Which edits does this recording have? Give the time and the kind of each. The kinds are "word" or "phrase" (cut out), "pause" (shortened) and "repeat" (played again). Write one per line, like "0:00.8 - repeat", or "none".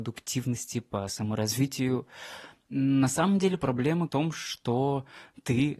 0:04.1 - phrase

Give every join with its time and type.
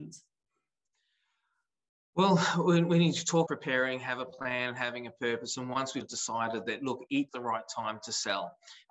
0:03.5 - phrase
0:06.0 - word
0:07.3 - word

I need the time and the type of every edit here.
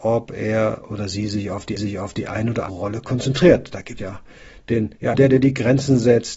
0:01.8 - repeat
0:02.7 - word
0:04.0 - word
0:05.1 - word

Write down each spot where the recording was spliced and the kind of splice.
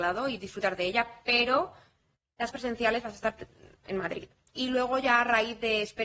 0:02.5 - word

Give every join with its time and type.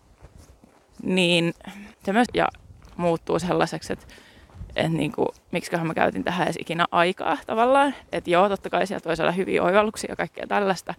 0:01.9 - pause
0:02.3 - phrase

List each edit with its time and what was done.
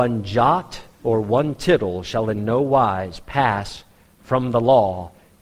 0:00.9 - pause

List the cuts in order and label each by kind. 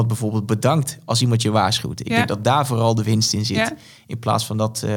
none

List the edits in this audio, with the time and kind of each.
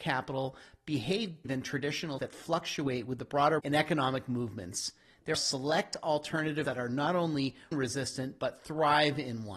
0:01.5 - word
0:02.2 - word
0:03.6 - word
0:05.3 - word
0:06.6 - word
0:07.7 - word

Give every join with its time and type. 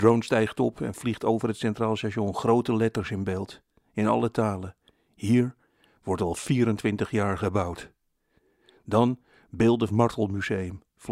0:09.9 - phrase

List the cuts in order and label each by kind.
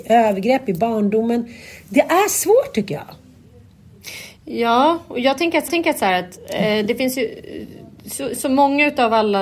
0:04.4 - pause
0:05.7 - repeat

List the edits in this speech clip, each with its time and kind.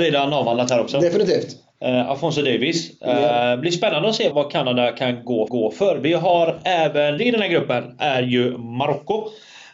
0:04.3 - word
0:05.5 - repeat
0:07.2 - phrase

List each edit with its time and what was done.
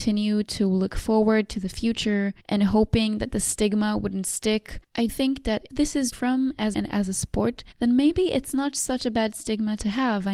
0:02.4 - pause
0:05.1 - word
0:05.7 - word
0:06.1 - phrase
0:06.7 - phrase
0:07.7 - pause

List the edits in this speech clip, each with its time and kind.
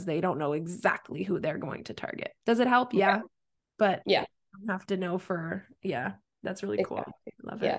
none

